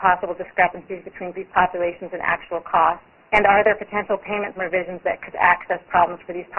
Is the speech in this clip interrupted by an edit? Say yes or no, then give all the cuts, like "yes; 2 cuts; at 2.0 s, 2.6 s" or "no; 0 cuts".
yes; 4 cuts; at 1.3 s, 3.2 s, 4.6 s, 5.3 s